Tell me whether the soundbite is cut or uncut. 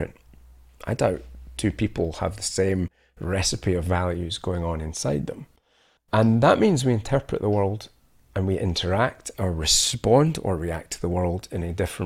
uncut